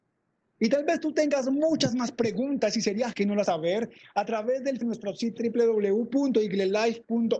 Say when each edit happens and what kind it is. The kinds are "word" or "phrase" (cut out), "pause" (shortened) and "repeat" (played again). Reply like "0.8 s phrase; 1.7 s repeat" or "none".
3.1 s word; 3.5 s word; 4.8 s word; 5.4 s word

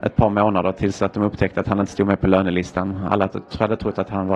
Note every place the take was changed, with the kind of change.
none

